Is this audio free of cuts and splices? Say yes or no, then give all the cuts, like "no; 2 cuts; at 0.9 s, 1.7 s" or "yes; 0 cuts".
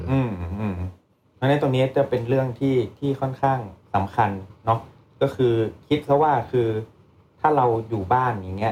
yes; 0 cuts